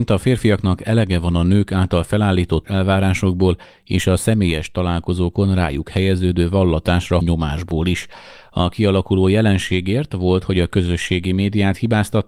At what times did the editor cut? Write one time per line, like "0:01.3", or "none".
0:02.6
0:07.2